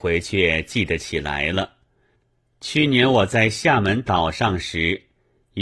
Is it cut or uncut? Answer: uncut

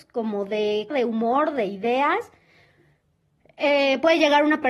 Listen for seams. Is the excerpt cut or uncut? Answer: cut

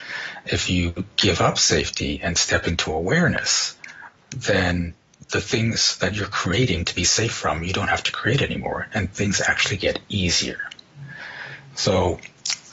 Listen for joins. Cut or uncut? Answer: cut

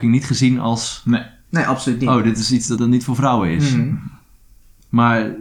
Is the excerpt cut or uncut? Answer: cut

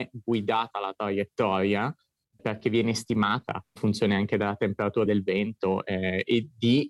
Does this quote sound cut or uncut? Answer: cut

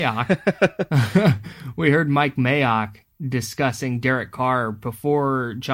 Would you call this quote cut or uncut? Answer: uncut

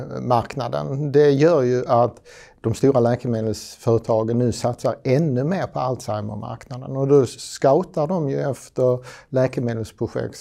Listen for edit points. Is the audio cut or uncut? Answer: uncut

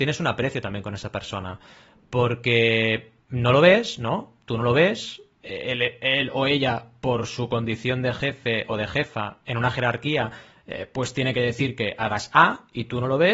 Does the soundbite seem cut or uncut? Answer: uncut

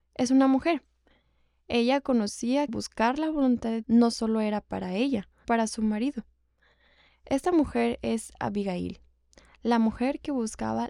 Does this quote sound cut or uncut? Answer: cut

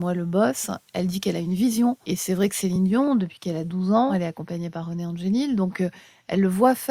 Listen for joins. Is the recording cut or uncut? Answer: uncut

